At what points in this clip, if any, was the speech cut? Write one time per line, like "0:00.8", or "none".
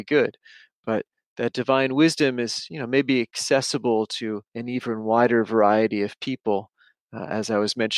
0:04.5